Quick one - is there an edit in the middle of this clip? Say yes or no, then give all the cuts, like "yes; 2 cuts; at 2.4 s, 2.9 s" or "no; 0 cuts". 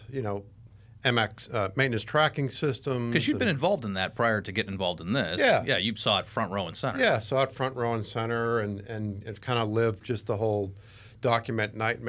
no; 0 cuts